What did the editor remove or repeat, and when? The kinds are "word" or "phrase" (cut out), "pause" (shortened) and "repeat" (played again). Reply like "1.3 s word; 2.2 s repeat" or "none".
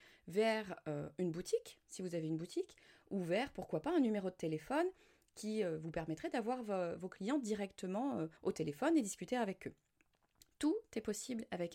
8.4 s pause